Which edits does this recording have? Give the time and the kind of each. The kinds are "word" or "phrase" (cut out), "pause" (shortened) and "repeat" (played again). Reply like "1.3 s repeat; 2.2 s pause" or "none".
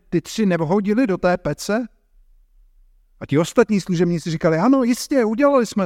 none